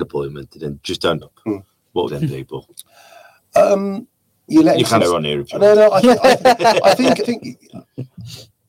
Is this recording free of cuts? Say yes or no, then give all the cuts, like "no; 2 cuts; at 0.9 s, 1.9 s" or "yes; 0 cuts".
no; 5 cuts; at 1.2 s, 2.1 s, 4.5 s, 5.0 s, 7.2 s